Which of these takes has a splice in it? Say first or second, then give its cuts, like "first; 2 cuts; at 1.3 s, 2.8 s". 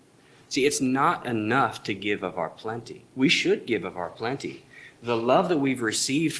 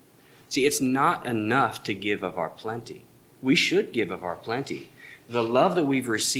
first; 1 cut; at 3.1 s